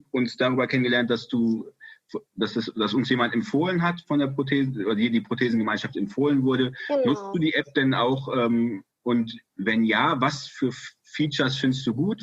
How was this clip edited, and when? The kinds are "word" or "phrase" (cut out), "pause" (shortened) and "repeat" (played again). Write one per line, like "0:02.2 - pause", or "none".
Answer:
0:08.9 - pause